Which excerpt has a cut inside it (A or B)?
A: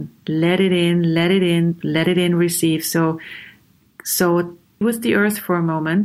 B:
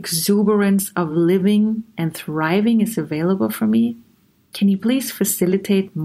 A